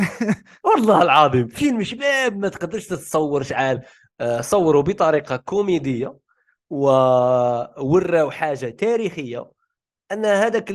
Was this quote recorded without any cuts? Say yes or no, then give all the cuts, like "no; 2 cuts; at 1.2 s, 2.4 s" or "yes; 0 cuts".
yes; 0 cuts